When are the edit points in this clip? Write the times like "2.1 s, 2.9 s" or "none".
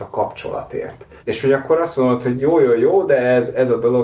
1.2 s